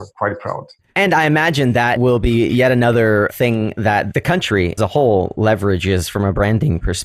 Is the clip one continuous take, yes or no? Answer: no